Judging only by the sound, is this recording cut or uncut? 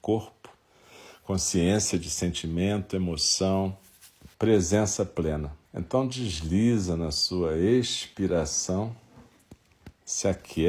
cut